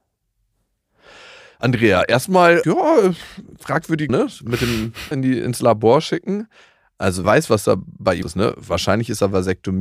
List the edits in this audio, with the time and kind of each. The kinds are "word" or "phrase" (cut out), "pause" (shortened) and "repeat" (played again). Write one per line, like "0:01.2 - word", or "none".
0:02.6 - word
0:04.1 - word
0:05.1 - word
0:07.2 - word
0:08.2 - word